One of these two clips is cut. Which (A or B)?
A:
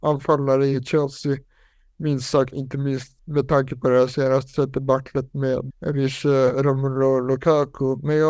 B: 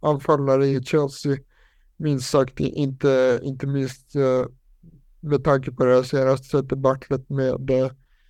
A